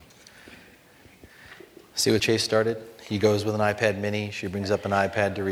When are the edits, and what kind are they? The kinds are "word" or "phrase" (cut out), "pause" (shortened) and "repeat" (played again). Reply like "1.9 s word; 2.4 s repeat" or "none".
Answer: 2.2 s word